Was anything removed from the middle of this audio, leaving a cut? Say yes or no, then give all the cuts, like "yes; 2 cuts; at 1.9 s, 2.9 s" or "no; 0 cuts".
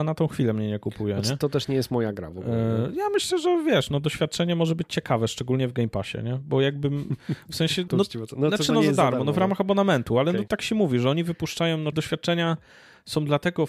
yes; 3 cuts; at 7.9 s, 10.5 s, 11.9 s